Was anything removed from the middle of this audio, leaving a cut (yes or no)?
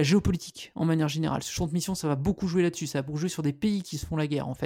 no